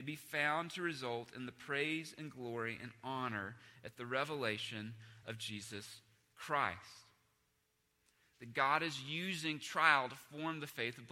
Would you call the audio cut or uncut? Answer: uncut